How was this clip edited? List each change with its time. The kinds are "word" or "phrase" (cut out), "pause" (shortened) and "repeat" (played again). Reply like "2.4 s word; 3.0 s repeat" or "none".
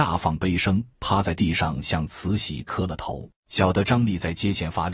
0.9 s pause; 3.4 s pause

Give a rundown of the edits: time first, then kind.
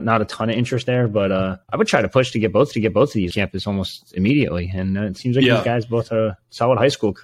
1.6 s pause; 2.7 s repeat; 3.3 s word

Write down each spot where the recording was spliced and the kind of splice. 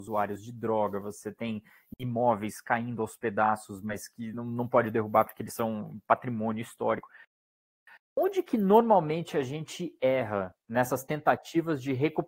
none

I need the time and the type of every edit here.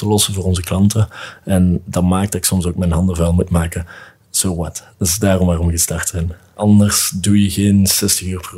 none

